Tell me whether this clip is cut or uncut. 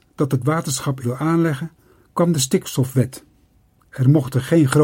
cut